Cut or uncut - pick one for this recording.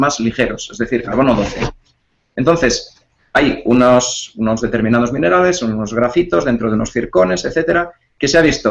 uncut